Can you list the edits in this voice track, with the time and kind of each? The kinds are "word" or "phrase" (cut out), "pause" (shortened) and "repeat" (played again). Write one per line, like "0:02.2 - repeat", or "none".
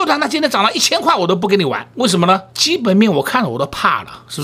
0:01.9 - pause
0:02.5 - pause